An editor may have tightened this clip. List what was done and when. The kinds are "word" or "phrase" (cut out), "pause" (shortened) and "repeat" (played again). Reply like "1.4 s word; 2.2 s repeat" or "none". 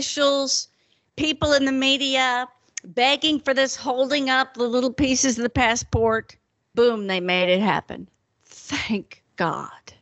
6.7 s word